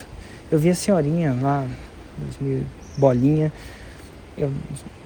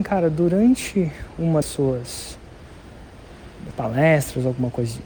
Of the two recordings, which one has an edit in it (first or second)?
second